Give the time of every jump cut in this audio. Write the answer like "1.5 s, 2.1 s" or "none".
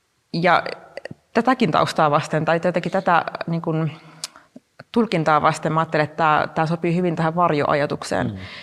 none